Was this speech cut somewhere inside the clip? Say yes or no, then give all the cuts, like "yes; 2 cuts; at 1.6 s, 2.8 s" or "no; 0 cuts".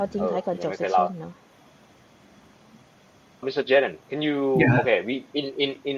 yes; 1 cut; at 3.4 s